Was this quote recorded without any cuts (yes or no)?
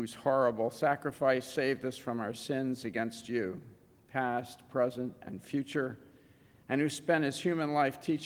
yes